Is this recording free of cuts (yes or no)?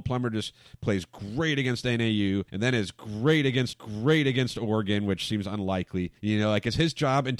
no